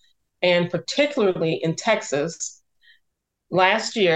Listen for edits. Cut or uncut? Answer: uncut